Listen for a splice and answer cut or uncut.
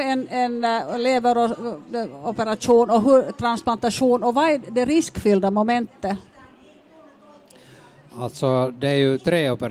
uncut